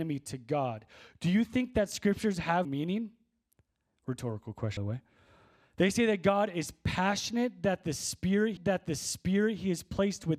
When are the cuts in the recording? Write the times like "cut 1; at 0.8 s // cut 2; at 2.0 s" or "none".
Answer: cut 1; at 2.6 s // cut 2; at 4.8 s // cut 3; at 8.6 s